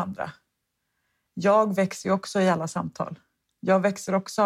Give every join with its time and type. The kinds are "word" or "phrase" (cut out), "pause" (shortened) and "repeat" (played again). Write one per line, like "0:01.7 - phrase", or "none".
none